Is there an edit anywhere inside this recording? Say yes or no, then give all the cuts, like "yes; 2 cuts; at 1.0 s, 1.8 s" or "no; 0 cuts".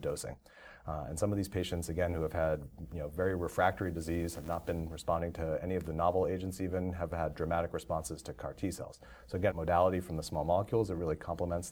yes; 1 cut; at 9.5 s